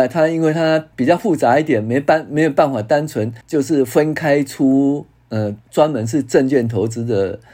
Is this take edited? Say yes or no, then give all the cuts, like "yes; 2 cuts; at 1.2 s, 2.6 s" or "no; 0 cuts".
yes; 3 cuts; at 0.9 s, 3.4 s, 5.6 s